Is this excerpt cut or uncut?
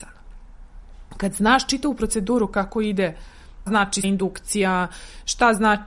cut